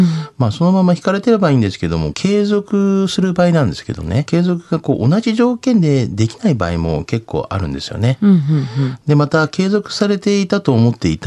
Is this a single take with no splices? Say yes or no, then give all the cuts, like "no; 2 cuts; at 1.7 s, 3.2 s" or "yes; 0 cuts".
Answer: no; 2 cuts; at 2.1 s, 4.3 s